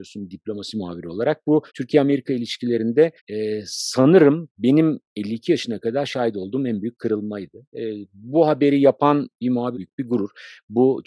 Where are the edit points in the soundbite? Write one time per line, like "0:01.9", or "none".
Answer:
0:01.7
0:03.2
0:09.7